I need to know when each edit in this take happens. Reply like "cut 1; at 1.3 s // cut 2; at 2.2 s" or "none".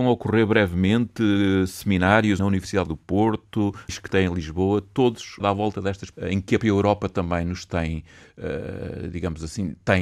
cut 1; at 2.4 s // cut 2; at 2.9 s // cut 3; at 3.9 s // cut 4; at 5.4 s // cut 5; at 6.1 s // cut 6; at 6.6 s